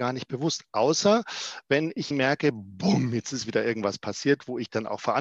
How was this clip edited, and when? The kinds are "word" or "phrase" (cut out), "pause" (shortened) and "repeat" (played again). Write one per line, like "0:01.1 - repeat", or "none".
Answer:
0:02.1 - word